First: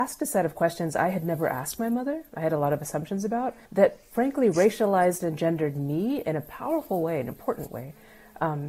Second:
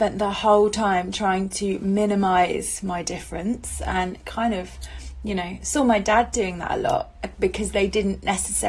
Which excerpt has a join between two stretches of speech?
first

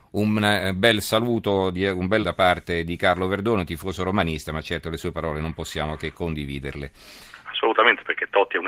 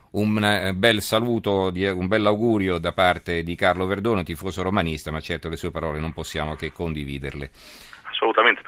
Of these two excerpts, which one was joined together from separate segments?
first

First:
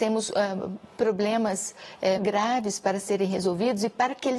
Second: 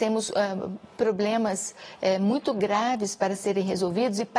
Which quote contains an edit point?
first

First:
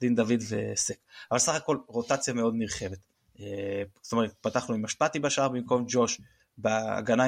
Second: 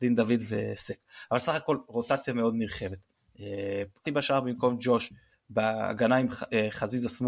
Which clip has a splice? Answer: second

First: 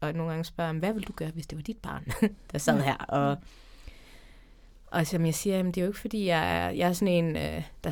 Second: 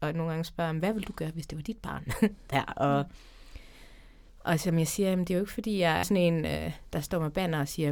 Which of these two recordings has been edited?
second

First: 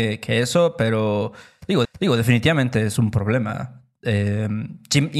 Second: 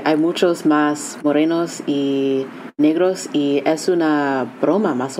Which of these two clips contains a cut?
first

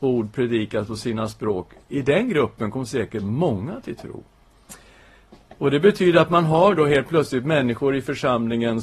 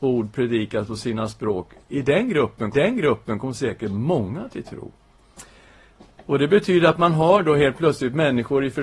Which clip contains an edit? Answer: second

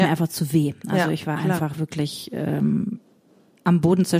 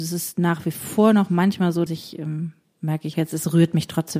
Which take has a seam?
second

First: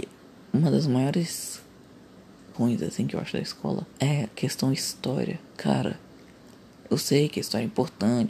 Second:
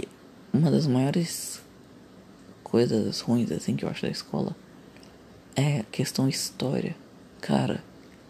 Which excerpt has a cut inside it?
first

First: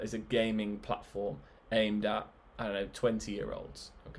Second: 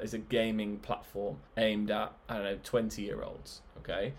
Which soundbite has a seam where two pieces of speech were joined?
second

